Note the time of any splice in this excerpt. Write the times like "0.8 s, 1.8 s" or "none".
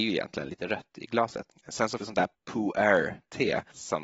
2.0 s, 2.3 s